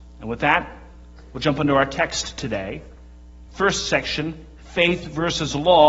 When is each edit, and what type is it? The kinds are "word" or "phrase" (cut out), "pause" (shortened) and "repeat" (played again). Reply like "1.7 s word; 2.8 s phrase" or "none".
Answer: none